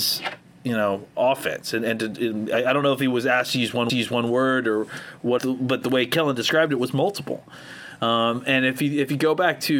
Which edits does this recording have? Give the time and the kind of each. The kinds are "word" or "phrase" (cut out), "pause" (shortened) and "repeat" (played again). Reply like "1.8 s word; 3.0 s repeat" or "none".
3.9 s repeat; 5.4 s phrase

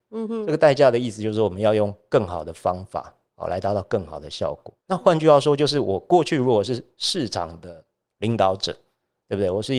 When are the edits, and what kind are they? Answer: 4.8 s pause

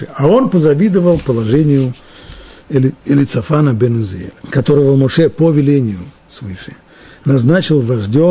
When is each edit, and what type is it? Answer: 3.0 s pause; 4.4 s pause

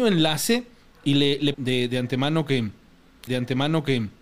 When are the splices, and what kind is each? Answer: 1.5 s word; 3.3 s repeat

